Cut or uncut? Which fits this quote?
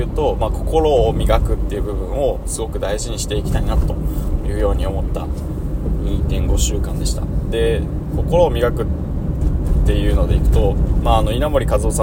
uncut